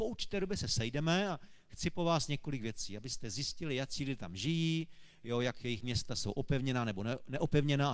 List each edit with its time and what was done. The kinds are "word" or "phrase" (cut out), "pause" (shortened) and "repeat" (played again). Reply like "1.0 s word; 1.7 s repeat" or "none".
none